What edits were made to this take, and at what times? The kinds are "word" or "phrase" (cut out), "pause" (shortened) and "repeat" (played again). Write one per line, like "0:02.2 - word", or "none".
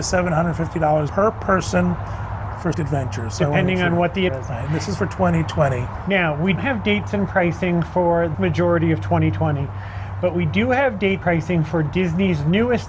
0:01.1 - word
0:02.7 - word
0:04.3 - word
0:06.6 - word
0:08.3 - word
0:11.2 - word